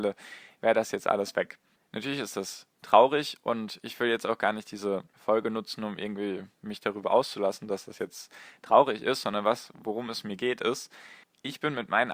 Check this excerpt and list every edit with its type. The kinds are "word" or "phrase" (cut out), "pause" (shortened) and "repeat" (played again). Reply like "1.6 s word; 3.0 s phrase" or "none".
1.8 s pause; 5.1 s pause; 11.2 s pause